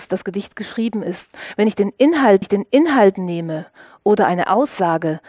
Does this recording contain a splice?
yes; 1 cut; at 2.4 s

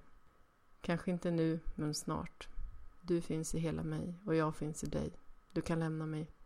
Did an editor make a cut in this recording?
no; 0 cuts

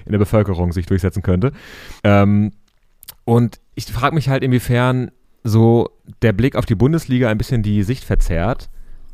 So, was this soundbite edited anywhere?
yes; 3 cuts; at 2.0 s, 3.7 s, 5.2 s

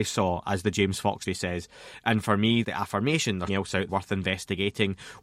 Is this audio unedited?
no; 4 cuts; at 1.3 s, 2.6 s, 3.5 s, 3.9 s

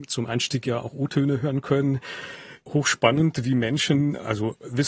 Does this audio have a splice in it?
no; 0 cuts

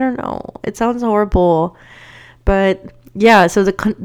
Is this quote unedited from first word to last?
yes; 0 cuts

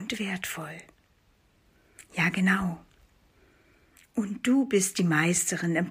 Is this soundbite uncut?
yes; 0 cuts

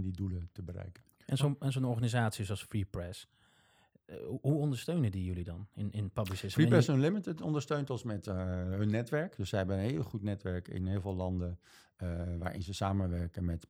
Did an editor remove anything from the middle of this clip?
no; 0 cuts

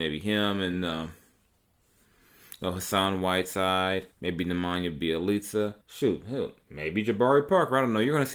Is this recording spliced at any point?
yes; 2 cuts; at 4.1 s, 5.8 s

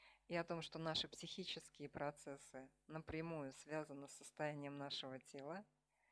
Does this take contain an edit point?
no; 0 cuts

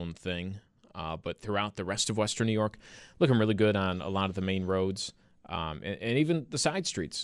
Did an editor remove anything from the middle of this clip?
no; 0 cuts

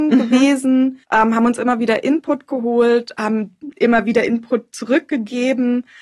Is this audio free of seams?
no; 1 cut; at 1.0 s

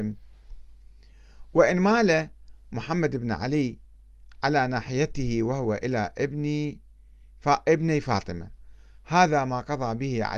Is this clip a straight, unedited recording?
yes; 0 cuts

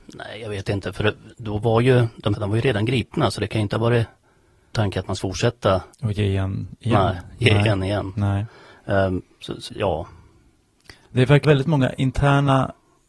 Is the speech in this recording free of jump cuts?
no; 8 cuts; at 1.3 s, 2.3 s, 4.7 s, 5.2 s, 5.9 s, 9.3 s, 9.7 s, 11.4 s

